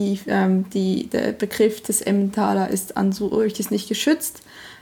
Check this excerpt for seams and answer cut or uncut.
uncut